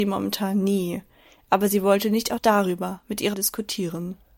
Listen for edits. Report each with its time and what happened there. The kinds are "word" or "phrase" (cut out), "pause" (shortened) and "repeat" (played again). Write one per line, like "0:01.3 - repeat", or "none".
0:02.4 - word
0:03.3 - word